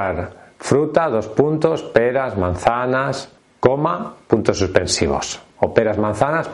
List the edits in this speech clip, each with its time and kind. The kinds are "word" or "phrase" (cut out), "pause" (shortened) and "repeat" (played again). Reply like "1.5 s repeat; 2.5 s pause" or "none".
3.4 s pause